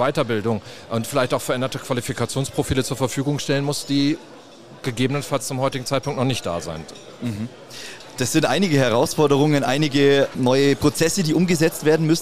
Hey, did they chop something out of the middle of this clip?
no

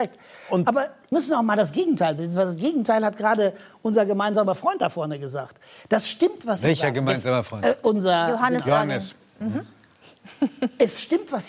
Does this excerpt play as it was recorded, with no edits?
no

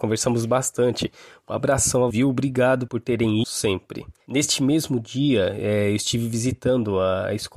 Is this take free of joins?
no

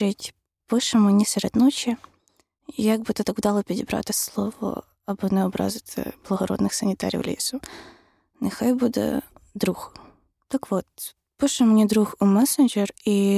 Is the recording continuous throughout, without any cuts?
yes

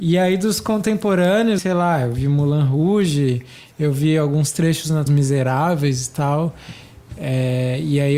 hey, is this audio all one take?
no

